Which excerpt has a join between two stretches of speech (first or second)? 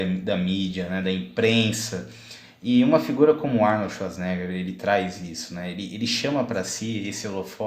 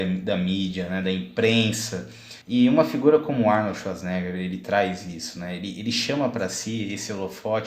second